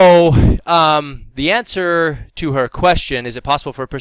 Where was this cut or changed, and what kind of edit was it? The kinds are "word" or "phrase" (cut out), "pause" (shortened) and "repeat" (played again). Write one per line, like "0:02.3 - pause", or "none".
none